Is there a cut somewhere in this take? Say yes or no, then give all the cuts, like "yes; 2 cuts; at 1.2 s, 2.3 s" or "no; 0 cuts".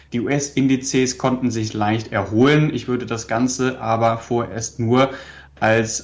no; 0 cuts